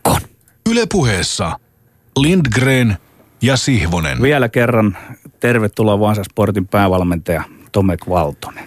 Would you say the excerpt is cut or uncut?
uncut